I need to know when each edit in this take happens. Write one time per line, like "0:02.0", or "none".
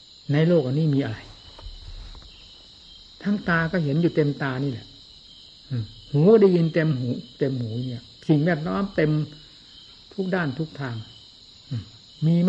0:08.2